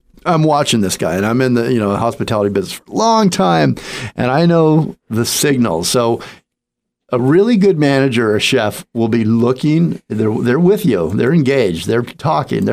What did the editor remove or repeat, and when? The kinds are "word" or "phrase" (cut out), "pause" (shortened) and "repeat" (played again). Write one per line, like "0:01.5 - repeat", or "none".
none